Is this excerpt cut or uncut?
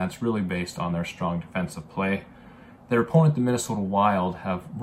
uncut